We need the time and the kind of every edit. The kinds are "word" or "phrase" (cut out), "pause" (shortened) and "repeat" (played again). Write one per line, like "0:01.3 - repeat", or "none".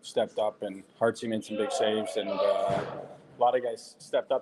0:00.9 - pause